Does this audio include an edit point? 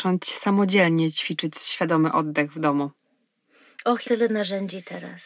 yes; 1 cut; at 4.0 s

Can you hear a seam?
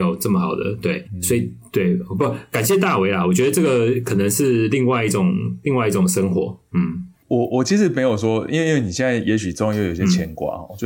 yes; 2 cuts; at 1.0 s, 6.7 s

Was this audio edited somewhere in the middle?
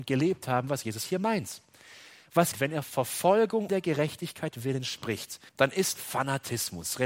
yes; 5 cuts; at 2.5 s, 2.8 s, 3.7 s, 5.5 s, 6.0 s

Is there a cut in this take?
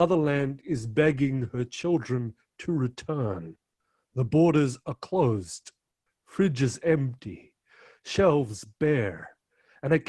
no; 0 cuts

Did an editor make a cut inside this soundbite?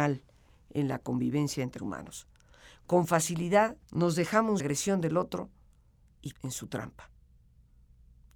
yes; 4 cuts; at 1.8 s, 3.8 s, 4.6 s, 6.3 s

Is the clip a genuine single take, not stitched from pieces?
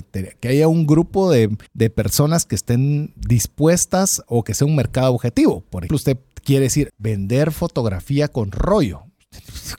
no; 3 cuts; at 1.7 s, 5.9 s, 6.9 s

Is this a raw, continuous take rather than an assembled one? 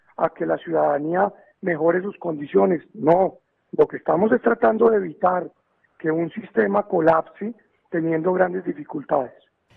yes; 0 cuts

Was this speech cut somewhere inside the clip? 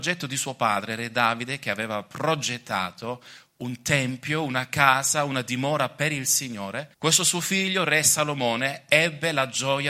yes; 1 cut; at 6.9 s

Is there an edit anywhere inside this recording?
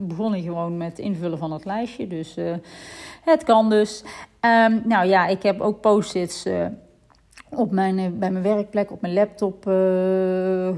no; 0 cuts

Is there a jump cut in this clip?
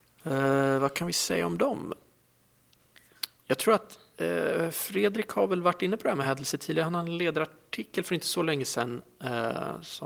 no; 0 cuts

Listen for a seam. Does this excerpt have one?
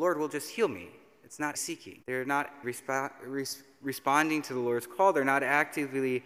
yes; 3 cuts; at 1.5 s, 2.0 s, 2.6 s

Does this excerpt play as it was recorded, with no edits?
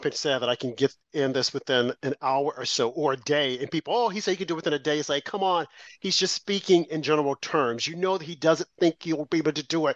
yes; 0 cuts

